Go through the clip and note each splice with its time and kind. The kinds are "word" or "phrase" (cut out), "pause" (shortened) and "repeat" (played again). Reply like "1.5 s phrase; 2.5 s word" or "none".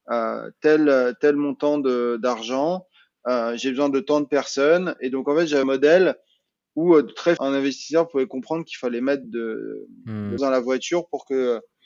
5.6 s word; 7.4 s word; 9.2 s word; 10.4 s word